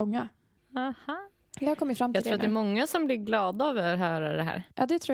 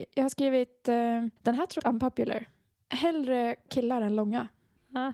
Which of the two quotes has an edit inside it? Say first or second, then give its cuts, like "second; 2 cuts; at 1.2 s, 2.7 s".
second; 3 cuts; at 1.4 s, 1.8 s, 3.7 s